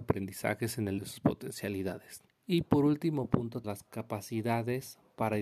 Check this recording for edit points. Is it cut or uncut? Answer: cut